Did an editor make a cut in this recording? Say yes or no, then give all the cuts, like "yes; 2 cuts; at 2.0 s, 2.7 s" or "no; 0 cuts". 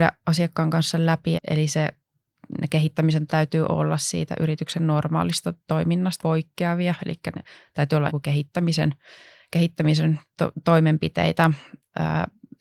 yes; 4 cuts; at 1.4 s, 3.3 s, 6.2 s, 8.1 s